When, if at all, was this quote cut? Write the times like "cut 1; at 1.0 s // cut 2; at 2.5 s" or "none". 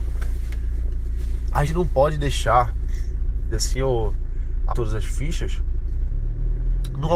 cut 1; at 1.6 s // cut 2; at 3.5 s // cut 3; at 4.7 s